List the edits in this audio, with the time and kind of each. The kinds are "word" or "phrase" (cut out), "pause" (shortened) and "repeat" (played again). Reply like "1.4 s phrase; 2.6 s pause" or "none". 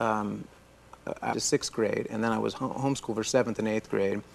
1.3 s word